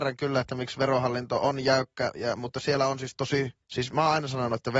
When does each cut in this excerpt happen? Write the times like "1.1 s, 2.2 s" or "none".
3.6 s